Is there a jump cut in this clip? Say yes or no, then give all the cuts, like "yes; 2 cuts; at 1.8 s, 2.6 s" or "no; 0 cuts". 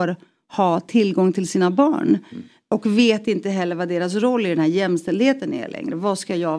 no; 0 cuts